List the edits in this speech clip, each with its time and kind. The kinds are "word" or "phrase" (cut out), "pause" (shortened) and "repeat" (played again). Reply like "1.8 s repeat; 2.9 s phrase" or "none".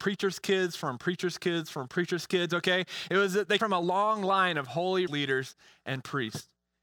3.6 s word; 5.1 s word